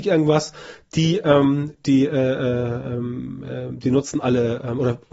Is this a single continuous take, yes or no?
yes